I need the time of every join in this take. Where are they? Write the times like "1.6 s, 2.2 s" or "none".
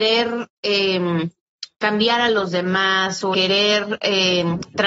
1.7 s, 3.3 s